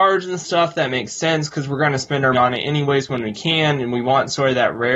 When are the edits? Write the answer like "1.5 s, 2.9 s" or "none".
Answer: 2.3 s